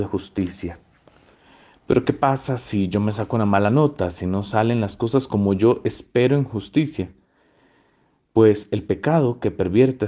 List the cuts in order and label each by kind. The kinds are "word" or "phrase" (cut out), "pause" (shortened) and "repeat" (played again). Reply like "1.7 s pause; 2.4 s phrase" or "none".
none